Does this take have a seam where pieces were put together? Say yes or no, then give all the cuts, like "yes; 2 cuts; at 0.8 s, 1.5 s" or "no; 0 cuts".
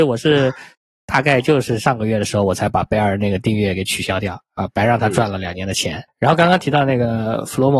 no; 0 cuts